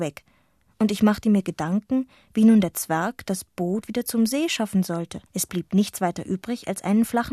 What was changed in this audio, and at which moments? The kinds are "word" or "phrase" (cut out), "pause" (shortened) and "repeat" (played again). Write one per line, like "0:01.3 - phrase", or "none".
0:05.3 - pause